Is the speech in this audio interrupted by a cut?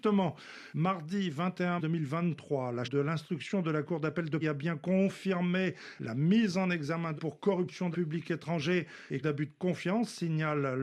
yes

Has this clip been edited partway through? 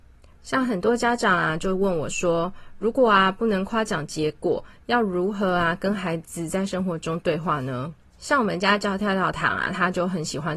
yes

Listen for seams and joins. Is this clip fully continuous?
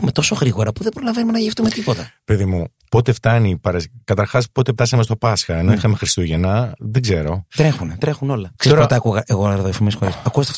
yes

